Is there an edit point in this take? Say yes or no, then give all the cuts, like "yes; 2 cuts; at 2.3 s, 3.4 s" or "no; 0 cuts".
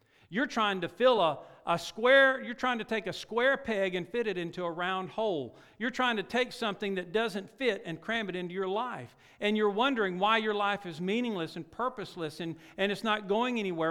no; 0 cuts